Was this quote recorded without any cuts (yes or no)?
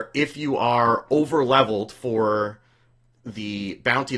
yes